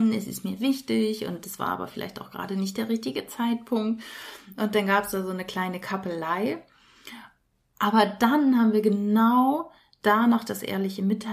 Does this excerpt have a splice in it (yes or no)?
no